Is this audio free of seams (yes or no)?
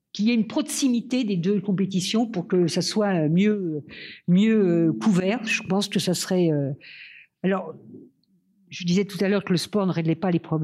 no